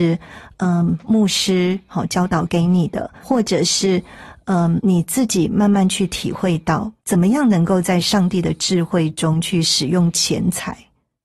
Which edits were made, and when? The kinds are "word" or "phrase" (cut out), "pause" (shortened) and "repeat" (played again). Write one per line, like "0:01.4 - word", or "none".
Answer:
0:03.2 - word
0:04.8 - word
0:07.0 - pause